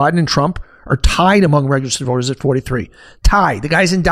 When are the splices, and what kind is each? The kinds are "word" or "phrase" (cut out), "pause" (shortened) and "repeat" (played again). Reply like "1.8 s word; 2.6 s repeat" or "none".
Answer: none